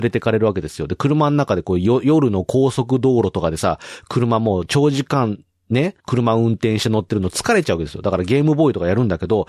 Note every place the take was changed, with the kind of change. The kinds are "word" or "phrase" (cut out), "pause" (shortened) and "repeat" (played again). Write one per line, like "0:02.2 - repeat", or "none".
0:06.0 - pause